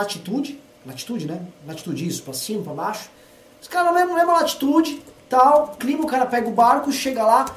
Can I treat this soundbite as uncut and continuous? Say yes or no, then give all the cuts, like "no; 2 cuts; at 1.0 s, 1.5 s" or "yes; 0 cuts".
no; 1 cut; at 5.8 s